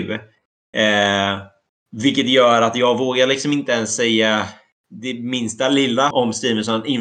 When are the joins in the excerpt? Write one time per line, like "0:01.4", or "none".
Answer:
0:06.1

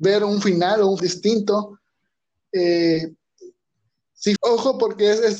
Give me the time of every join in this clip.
0:01.0
0:04.4

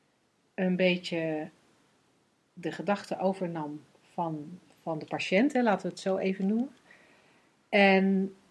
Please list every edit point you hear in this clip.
none

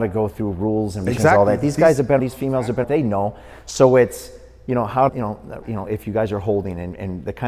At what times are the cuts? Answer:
0:01.1
0:02.2
0:02.8
0:05.1
0:05.6

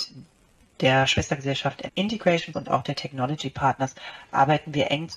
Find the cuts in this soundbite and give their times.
0:01.9
0:02.5

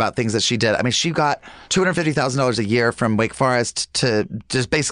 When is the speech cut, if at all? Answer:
0:01.6

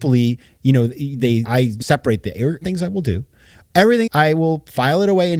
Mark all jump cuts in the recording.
0:01.4
0:01.8
0:02.6
0:04.1

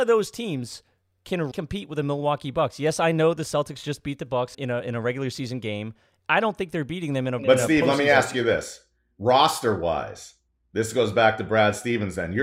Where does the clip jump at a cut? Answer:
0:01.5
0:04.5

